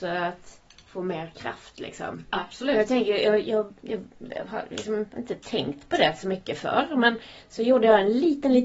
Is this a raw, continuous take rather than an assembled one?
yes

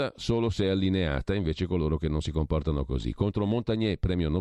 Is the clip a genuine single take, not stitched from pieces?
yes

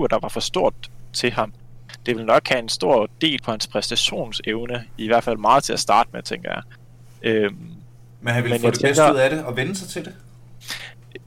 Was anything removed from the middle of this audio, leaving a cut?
yes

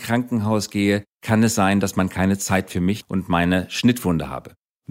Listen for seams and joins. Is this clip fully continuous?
yes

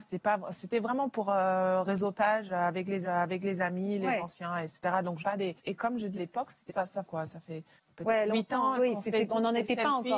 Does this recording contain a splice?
yes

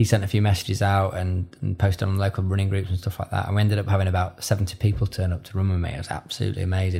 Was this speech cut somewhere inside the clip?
no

